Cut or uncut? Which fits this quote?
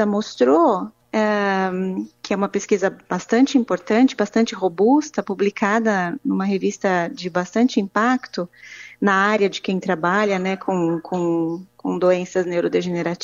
uncut